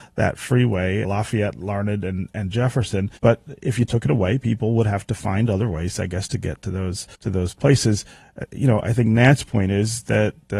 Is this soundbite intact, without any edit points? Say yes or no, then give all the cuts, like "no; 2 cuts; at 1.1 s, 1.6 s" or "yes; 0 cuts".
no; 3 cuts; at 1.0 s, 3.2 s, 7.1 s